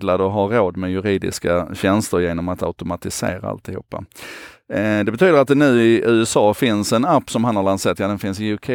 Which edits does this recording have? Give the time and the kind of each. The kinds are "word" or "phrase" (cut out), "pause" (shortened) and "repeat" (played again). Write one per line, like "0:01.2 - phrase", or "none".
none